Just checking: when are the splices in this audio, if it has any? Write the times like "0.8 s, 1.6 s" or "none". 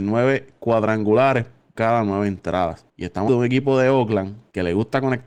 1.7 s, 3.3 s